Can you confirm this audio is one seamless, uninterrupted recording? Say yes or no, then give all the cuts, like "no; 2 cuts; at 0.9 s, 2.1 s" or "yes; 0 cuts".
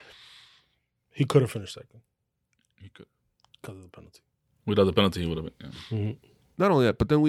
yes; 0 cuts